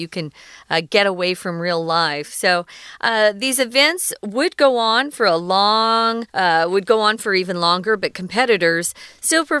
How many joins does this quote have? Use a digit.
1